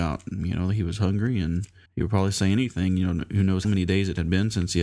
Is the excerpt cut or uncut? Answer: cut